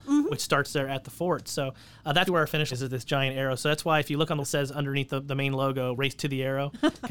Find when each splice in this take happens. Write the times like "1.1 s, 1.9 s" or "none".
2.3 s, 2.7 s, 4.4 s